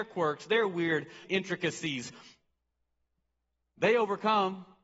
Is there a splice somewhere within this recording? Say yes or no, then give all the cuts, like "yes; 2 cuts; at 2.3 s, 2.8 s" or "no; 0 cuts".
yes; 1 cut; at 1.2 s